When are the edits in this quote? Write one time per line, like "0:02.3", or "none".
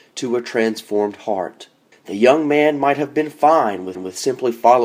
0:01.9
0:03.9

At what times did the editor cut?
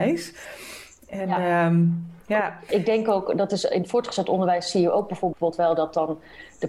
0:02.2

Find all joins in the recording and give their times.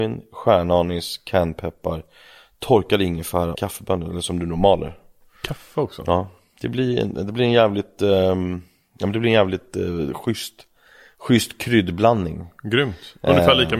0:03.5

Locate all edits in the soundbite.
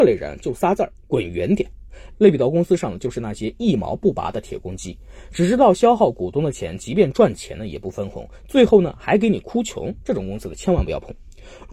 0:01.0

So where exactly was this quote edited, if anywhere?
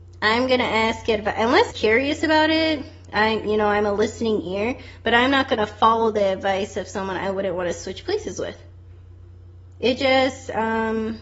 0:01.7

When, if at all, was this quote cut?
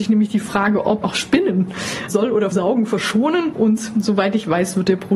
0:01.0
0:02.1
0:02.5

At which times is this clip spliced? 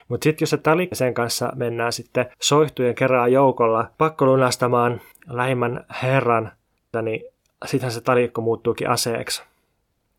0:00.9
0:02.3
0:03.9
0:05.1
0:06.9

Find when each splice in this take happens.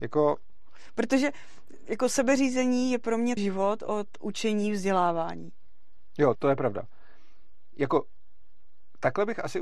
0:03.4
0:06.3

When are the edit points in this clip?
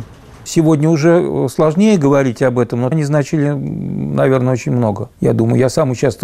0:02.9
0:05.1

